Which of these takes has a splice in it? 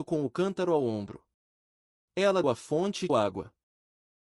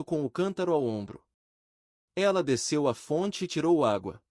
first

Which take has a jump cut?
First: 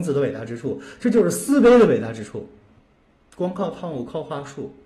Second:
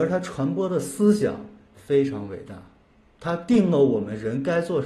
first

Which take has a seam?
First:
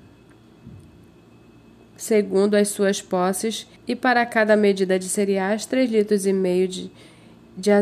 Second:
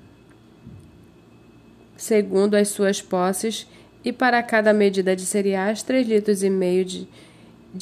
first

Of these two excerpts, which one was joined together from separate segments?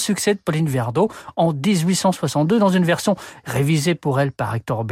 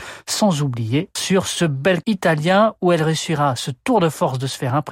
second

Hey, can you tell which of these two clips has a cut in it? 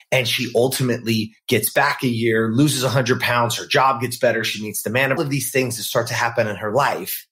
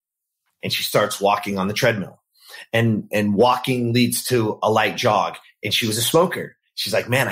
first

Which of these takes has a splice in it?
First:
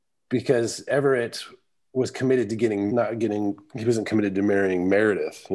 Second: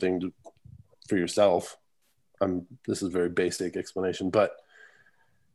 first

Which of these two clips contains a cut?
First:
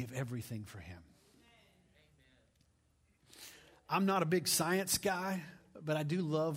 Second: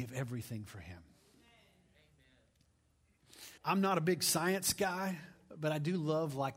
second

